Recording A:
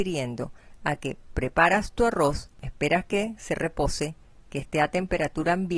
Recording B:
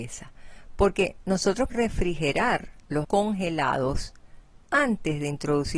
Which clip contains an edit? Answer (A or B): B